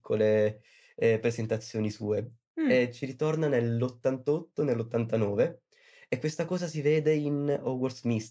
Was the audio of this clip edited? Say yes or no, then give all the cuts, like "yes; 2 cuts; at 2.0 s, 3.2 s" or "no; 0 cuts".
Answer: no; 0 cuts